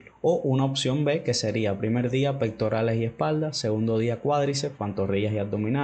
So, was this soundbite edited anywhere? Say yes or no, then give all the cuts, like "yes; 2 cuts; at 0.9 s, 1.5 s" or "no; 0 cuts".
no; 0 cuts